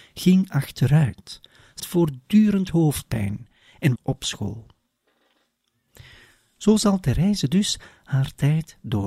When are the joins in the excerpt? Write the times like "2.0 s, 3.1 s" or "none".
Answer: 1.8 s, 4.0 s